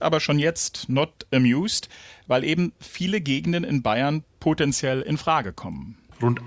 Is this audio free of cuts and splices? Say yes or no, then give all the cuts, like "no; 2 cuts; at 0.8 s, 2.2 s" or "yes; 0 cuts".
yes; 0 cuts